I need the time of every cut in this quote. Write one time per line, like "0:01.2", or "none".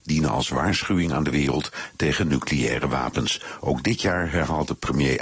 none